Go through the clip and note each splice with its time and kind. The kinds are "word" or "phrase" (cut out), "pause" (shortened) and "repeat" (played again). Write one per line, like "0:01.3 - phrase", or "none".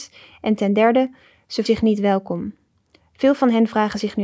0:01.7 - word